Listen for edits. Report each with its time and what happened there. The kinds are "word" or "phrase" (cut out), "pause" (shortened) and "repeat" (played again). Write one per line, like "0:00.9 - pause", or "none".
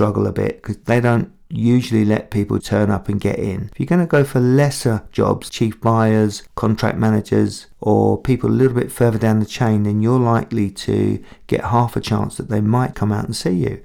0:02.6 - word
0:05.5 - word
0:12.9 - word